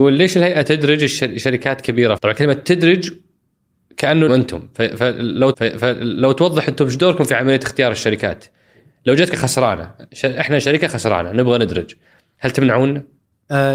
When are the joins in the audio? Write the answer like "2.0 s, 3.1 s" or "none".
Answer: 2.2 s, 4.3 s, 5.5 s, 9.3 s